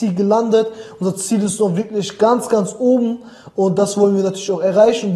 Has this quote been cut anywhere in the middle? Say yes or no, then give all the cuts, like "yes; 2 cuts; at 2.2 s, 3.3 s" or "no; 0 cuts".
no; 0 cuts